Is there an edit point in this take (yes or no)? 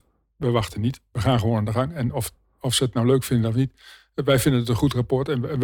no